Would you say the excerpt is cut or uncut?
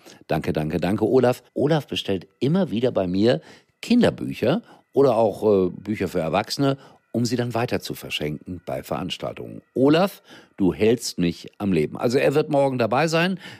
cut